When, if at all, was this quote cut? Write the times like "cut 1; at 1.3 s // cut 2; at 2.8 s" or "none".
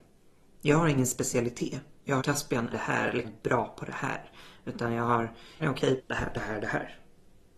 cut 1; at 2.2 s // cut 2; at 2.7 s // cut 3; at 3.2 s // cut 4; at 5.6 s // cut 5; at 6.0 s // cut 6; at 6.3 s